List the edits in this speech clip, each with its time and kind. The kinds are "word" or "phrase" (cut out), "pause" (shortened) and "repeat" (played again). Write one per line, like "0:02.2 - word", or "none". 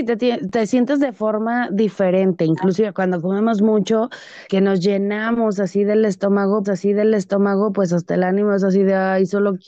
0:04.5 - word
0:06.6 - repeat